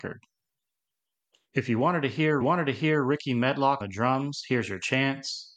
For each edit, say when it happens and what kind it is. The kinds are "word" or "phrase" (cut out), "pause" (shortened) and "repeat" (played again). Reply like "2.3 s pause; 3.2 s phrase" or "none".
2.4 s repeat; 3.8 s word